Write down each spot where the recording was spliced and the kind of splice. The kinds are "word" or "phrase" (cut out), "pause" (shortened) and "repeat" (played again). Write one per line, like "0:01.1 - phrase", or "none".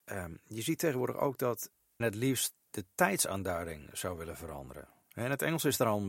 0:02.0 - word